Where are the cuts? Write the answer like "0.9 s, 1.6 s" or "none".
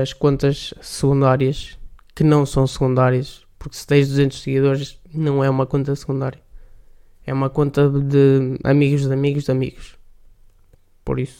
5.1 s

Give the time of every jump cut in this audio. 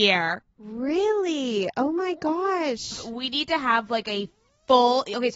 none

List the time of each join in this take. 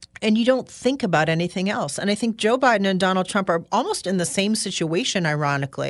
none

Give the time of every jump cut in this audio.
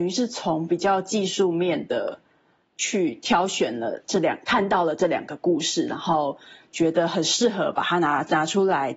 none

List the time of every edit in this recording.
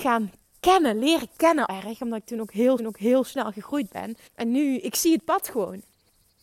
1.7 s, 2.8 s, 4.3 s

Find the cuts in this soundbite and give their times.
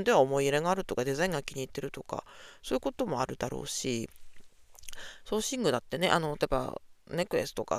none

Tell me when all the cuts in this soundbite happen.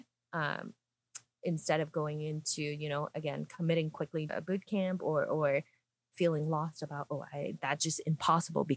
4.3 s

